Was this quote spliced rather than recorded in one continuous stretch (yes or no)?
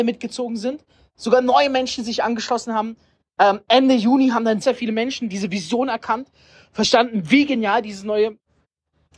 yes